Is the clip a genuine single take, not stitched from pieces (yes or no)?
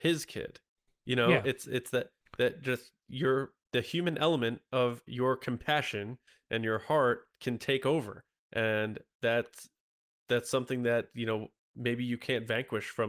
no